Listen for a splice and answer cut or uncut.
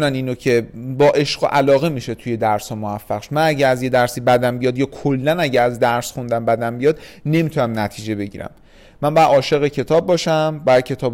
uncut